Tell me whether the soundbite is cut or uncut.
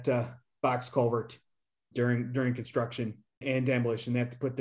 cut